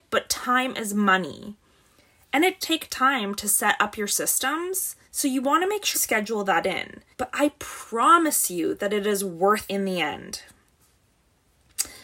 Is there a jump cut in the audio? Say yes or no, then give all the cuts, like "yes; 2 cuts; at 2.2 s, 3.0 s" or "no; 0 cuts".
yes; 5 cuts; at 2.6 s, 5.0 s, 5.9 s, 7.1 s, 9.7 s